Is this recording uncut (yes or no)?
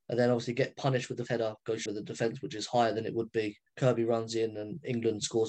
no